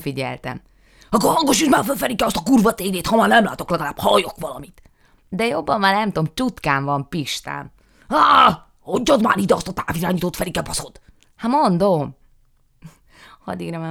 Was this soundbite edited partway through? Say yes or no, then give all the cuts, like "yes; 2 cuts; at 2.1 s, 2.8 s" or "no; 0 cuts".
no; 0 cuts